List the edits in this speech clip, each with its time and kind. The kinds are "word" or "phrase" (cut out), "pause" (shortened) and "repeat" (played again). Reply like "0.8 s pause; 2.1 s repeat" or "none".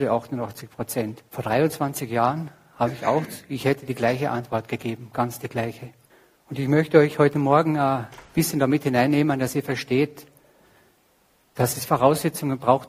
1.3 s pause; 6.1 s pause